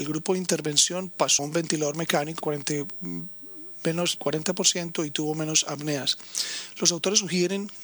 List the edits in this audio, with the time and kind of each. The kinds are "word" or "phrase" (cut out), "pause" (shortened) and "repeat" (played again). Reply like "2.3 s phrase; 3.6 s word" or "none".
1.4 s phrase; 2.4 s phrase; 4.2 s word